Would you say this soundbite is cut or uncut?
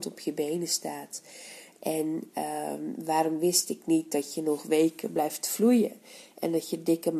uncut